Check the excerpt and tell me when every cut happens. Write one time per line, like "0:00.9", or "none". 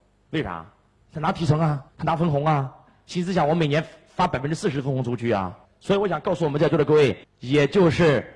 0:01.9
0:05.6
0:07.2